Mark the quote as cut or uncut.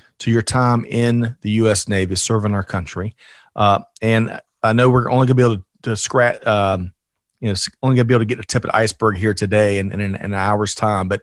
uncut